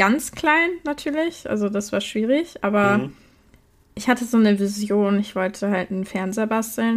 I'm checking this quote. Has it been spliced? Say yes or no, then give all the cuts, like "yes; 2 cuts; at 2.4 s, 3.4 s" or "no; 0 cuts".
no; 0 cuts